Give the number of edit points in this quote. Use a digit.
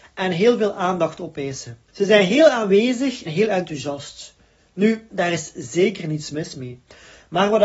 3